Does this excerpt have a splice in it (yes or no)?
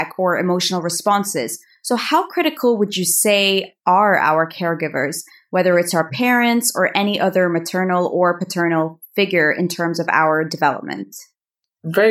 no